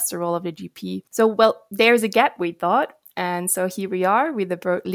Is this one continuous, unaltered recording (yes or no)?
no